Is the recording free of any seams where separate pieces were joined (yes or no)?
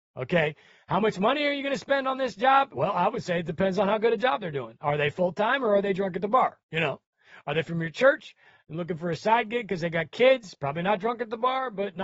no